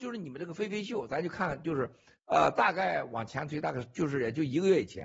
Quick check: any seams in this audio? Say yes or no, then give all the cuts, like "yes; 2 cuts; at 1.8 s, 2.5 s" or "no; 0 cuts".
no; 0 cuts